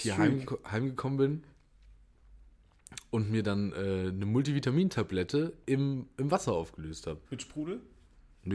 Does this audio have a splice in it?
yes; 1 cut; at 7.2 s

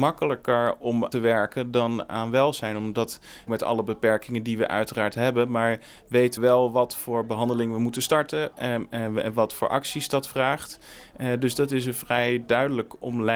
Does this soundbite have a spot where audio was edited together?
yes; 3 cuts; at 1.1 s, 3.5 s, 6.4 s

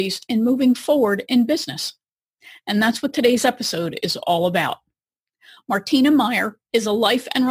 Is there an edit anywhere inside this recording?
no; 0 cuts

